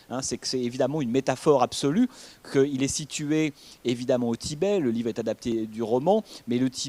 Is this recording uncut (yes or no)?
yes